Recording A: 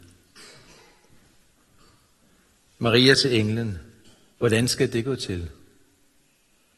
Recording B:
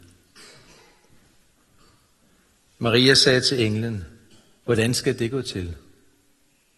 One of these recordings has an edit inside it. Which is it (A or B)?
A